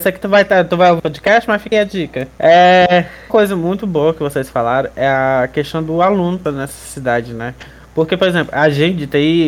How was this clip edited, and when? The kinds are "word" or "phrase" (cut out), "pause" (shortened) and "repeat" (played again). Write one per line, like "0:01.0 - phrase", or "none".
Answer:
0:01.0 - word
0:01.7 - word
0:03.3 - word
0:06.4 - word